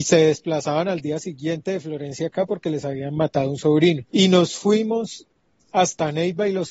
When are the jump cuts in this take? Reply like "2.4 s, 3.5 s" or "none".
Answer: 4.1 s